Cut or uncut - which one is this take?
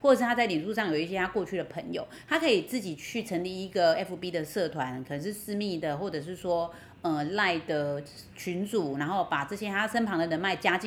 uncut